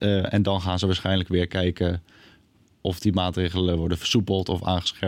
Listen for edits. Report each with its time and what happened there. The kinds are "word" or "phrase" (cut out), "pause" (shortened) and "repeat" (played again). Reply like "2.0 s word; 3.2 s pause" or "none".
none